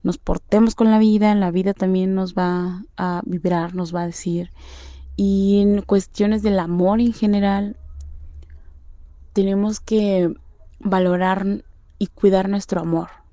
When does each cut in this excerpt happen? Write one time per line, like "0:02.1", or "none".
0:02.9